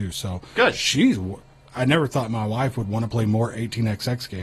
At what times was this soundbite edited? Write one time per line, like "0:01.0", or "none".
none